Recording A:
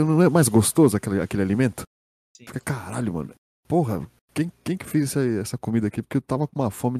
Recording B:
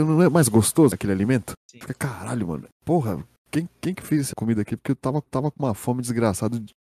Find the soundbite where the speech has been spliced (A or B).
B